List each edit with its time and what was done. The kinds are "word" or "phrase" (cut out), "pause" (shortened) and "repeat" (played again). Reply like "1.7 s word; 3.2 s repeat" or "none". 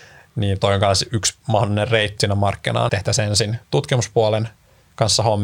2.2 s word; 2.9 s word; 3.6 s pause